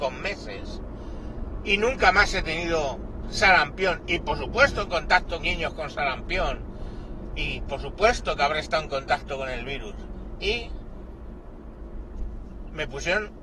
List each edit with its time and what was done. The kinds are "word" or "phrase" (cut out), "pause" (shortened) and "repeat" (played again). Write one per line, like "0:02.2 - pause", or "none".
0:04.9 - phrase
0:05.4 - word